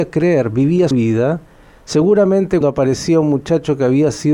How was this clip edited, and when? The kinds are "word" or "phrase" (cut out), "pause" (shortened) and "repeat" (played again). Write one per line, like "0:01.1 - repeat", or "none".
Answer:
0:00.9 - word
0:02.6 - word